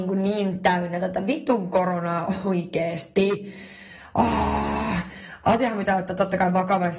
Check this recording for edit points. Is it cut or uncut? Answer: uncut